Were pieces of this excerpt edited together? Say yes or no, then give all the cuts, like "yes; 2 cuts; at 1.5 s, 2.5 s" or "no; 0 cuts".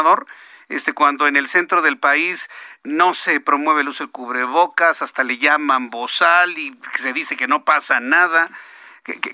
no; 0 cuts